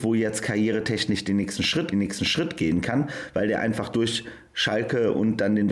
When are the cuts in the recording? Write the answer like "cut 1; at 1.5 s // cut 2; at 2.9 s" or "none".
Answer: cut 1; at 1.9 s